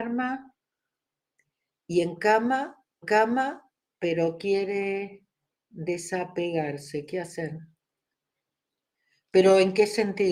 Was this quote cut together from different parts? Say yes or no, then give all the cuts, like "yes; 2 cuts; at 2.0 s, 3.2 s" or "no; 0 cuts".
yes; 1 cut; at 3.0 s